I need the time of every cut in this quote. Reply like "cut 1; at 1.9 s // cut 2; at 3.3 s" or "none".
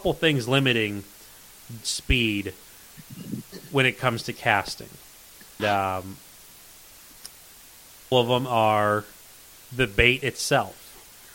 cut 1; at 1.8 s // cut 2; at 5.6 s // cut 3; at 8.1 s